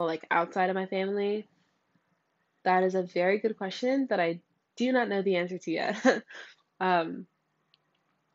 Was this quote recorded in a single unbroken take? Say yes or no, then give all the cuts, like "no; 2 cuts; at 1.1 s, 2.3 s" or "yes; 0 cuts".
yes; 0 cuts